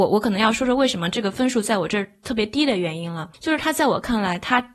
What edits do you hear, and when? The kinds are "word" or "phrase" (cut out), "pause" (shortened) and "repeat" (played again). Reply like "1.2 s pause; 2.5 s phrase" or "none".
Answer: 3.3 s pause